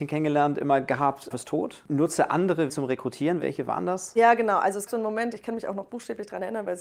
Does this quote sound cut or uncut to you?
cut